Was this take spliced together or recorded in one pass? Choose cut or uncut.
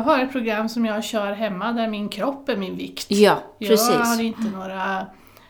uncut